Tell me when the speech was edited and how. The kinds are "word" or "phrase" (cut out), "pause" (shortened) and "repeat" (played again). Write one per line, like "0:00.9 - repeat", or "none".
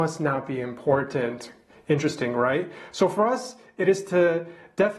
none